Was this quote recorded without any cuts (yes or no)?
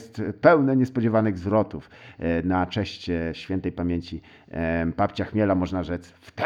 yes